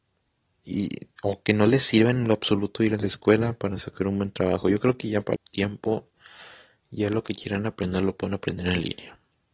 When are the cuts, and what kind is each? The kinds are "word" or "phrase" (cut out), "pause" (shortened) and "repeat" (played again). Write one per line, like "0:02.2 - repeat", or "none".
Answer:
0:01.1 - pause
0:05.4 - word